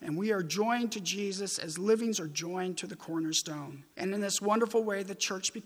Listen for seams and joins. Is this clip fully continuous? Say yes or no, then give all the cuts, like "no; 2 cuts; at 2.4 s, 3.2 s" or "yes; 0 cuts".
no; 2 cuts; at 2.1 s, 3.9 s